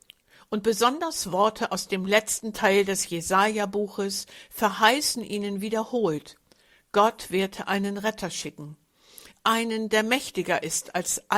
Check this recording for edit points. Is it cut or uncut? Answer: uncut